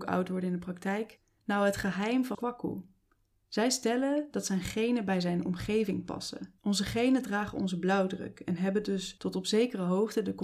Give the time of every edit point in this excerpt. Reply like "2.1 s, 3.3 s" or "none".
2.3 s, 6.6 s